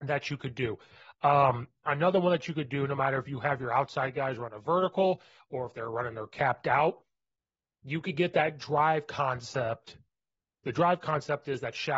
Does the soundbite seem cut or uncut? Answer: uncut